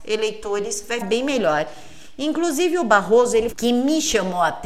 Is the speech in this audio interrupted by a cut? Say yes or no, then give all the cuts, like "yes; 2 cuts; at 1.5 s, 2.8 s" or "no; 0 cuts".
yes; 2 cuts; at 1.0 s, 3.5 s